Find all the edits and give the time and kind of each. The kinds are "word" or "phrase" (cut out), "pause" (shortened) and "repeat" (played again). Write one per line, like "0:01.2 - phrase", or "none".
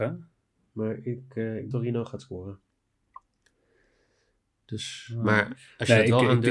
0:01.7 - phrase